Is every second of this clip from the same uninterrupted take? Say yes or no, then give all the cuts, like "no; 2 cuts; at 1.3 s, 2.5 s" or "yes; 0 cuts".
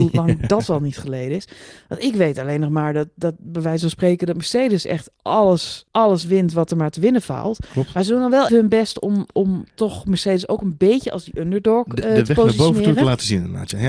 no; 2 cuts; at 5.9 s, 8.5 s